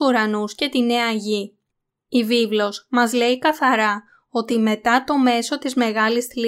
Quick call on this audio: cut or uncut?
uncut